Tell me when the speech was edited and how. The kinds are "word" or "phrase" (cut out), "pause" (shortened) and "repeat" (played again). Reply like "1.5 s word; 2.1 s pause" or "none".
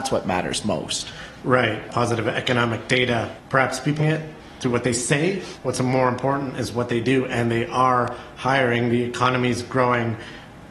1.9 s phrase; 4.0 s phrase; 5.6 s word